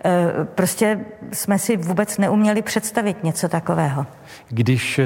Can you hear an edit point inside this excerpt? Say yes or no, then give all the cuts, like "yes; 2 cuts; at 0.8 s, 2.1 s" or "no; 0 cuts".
no; 0 cuts